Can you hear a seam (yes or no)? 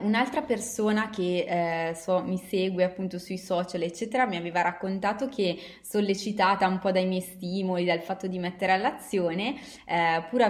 no